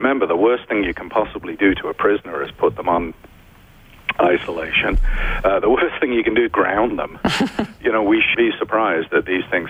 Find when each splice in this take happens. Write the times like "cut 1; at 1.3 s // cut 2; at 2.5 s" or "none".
cut 1; at 6.5 s // cut 2; at 8.3 s